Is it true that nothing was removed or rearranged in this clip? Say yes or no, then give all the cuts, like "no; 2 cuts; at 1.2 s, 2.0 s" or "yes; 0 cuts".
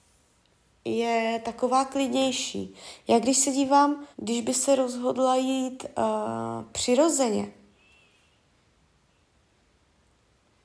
no; 1 cut; at 4.1 s